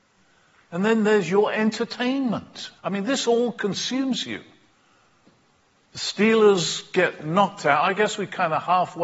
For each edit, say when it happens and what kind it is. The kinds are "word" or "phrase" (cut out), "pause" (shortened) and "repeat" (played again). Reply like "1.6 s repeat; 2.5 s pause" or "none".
2.8 s pause

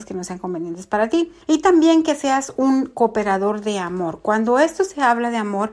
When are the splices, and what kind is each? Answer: 1.4 s pause

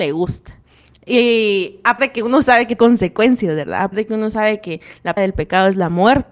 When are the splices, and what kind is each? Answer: 2.0 s word; 2.8 s word; 3.9 s word; 5.2 s word

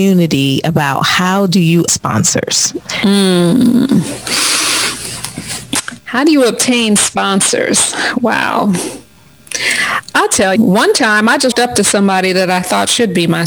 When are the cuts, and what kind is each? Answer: 1.9 s word; 10.6 s word; 11.5 s word

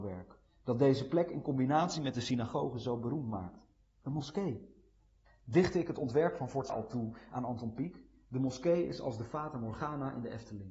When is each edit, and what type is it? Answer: 6.7 s word

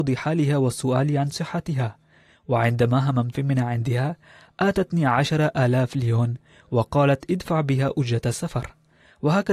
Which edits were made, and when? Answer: 3.3 s word

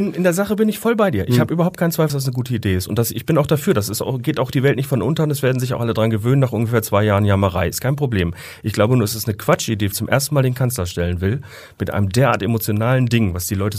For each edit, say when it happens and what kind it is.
2.1 s word; 9.9 s phrase

